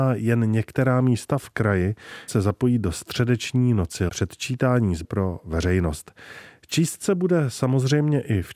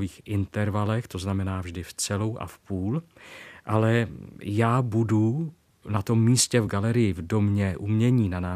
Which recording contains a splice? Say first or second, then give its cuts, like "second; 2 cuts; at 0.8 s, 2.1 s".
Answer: first; 3 cuts; at 2.3 s, 4.1 s, 5.0 s